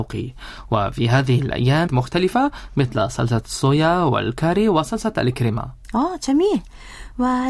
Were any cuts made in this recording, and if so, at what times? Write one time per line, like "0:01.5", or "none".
0:01.9

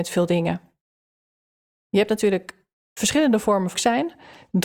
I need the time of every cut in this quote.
0:03.7

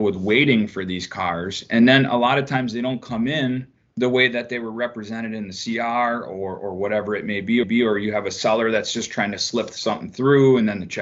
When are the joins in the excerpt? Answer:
0:03.8
0:07.6

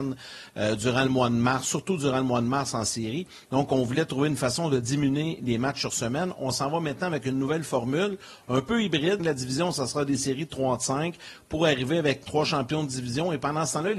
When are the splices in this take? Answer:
0:09.2
0:12.2

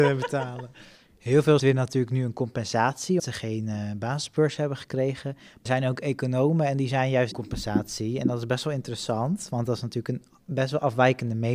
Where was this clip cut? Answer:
0:01.6
0:03.2
0:05.7
0:07.3

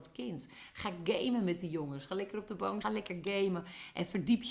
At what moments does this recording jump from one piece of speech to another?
0:02.8

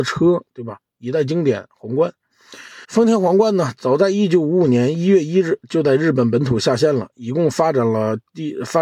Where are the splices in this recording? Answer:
0:02.8

